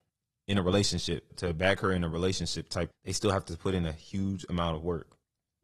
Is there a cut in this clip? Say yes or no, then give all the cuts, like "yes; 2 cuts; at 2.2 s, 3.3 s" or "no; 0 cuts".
yes; 2 cuts; at 1.3 s, 2.9 s